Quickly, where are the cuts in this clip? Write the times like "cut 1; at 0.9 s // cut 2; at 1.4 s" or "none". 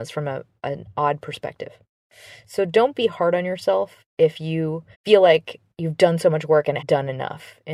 cut 1; at 4.9 s // cut 2; at 6.8 s